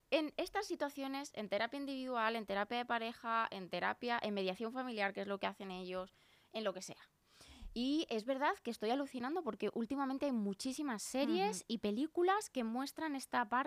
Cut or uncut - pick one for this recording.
uncut